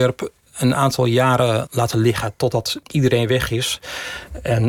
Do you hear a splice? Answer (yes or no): yes